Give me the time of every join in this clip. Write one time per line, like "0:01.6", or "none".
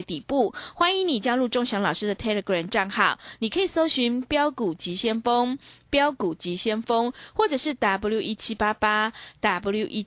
none